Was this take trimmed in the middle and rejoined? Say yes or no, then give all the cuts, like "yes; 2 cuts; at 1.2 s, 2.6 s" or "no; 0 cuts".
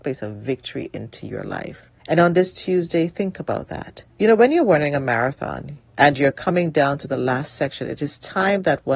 yes; 3 cuts; at 2.0 s, 4.1 s, 5.9 s